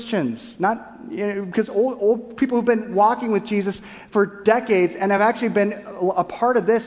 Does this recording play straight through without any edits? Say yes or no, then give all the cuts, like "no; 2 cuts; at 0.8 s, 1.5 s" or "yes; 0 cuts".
yes; 0 cuts